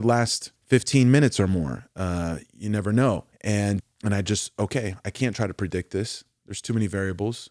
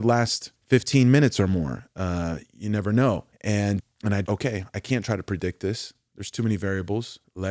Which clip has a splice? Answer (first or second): second